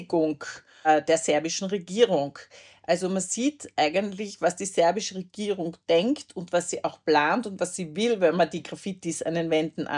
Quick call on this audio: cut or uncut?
uncut